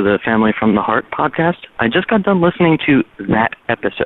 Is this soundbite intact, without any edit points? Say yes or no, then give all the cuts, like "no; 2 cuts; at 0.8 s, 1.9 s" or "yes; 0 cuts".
yes; 0 cuts